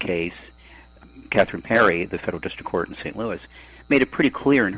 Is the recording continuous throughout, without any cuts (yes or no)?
yes